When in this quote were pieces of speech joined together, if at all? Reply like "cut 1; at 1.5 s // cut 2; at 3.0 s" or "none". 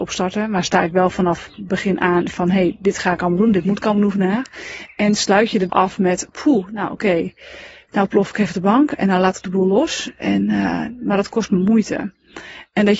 cut 1; at 5.7 s